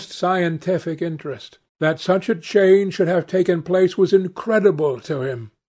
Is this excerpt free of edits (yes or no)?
no